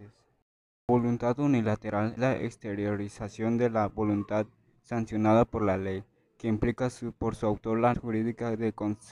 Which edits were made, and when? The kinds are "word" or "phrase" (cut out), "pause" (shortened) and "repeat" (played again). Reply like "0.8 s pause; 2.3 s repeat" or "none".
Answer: 2.2 s word; 7.9 s word